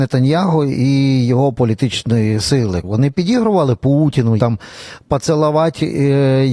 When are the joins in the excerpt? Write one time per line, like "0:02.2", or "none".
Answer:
0:02.8
0:04.4